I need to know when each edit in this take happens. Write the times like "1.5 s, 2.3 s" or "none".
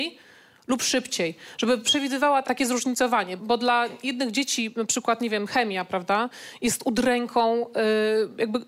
2.4 s, 3.4 s